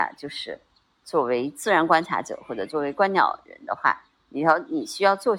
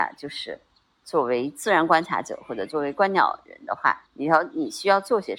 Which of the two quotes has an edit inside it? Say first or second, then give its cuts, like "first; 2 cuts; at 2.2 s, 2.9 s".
second; 1 cut; at 4.1 s